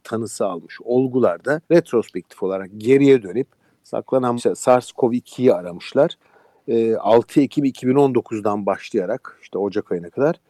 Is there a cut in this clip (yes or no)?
yes